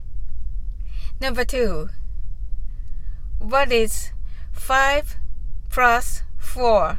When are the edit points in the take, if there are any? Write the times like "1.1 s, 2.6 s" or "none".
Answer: none

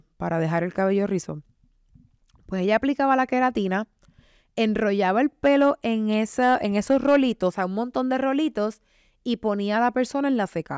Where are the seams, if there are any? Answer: none

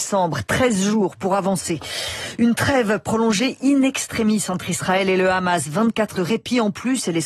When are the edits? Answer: 6.1 s

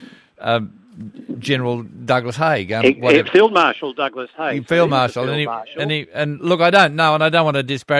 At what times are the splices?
none

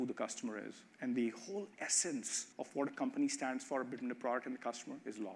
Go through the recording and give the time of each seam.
0.9 s, 2.5 s

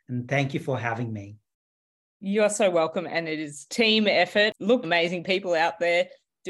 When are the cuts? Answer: 4.8 s

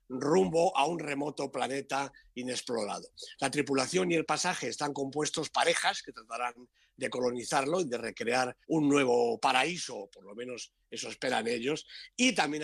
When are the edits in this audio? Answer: 5.5 s, 8.6 s

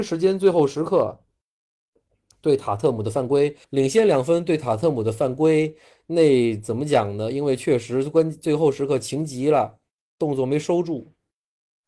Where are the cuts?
3.6 s

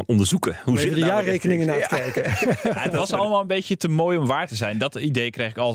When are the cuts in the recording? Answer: none

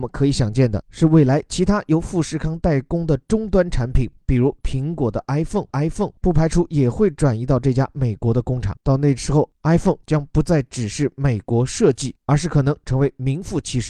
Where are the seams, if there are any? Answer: 5.7 s

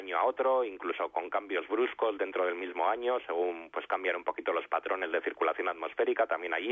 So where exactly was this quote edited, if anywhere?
3.7 s

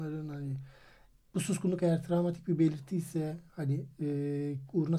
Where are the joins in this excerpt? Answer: none

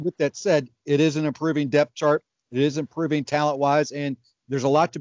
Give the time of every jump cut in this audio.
none

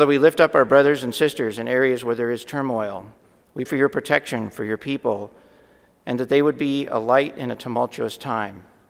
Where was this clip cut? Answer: 3.7 s

